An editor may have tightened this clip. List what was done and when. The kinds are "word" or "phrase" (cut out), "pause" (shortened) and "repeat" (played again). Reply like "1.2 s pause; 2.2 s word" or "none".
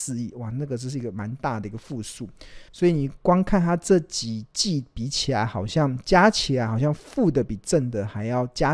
2.7 s pause